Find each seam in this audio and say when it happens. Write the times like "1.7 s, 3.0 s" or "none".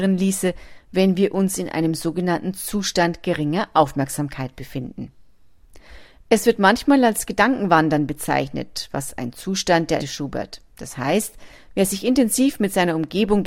10.0 s, 10.7 s

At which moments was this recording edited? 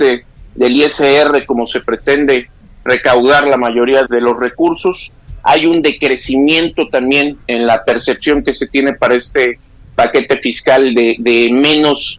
4.0 s, 7.5 s

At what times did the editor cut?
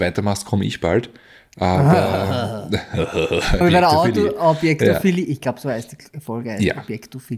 3.6 s

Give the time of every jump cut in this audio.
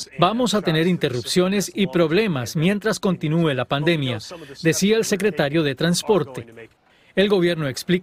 none

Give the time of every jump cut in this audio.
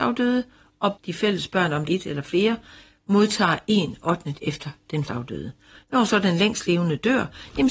1.0 s, 1.9 s, 4.4 s, 5.1 s

